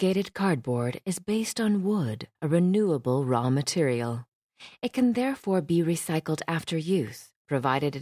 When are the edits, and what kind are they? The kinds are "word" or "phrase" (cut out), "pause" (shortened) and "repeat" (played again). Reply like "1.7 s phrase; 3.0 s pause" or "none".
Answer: 2.4 s pause